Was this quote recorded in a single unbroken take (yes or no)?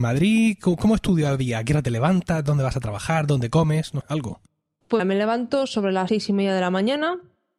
no